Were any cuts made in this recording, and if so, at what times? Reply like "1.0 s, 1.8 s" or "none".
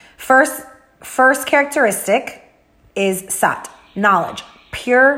none